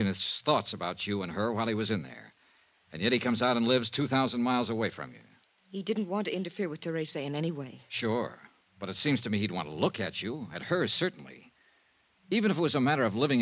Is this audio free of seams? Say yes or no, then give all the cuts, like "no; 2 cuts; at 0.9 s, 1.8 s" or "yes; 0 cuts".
yes; 0 cuts